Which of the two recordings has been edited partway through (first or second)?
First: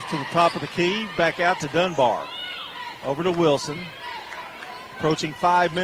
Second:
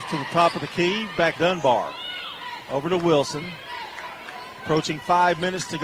second